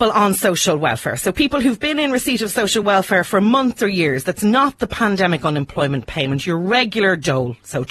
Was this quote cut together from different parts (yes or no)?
no